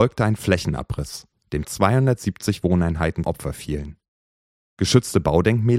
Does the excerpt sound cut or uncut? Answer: cut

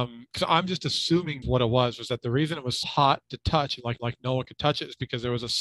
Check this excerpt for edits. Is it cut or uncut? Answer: cut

